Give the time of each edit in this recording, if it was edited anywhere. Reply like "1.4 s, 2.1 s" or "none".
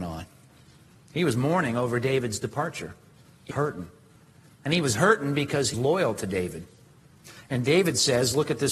3.5 s, 5.7 s